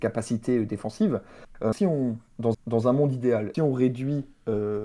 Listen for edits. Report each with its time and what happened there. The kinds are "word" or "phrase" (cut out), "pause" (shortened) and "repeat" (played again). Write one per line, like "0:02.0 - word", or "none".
0:01.7 - word
0:02.5 - repeat
0:03.5 - word